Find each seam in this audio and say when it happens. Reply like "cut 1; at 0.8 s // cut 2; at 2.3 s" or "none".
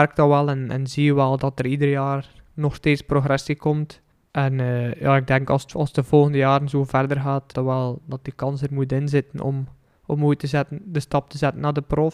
cut 1; at 1.4 s // cut 2; at 4.1 s // cut 3; at 7.5 s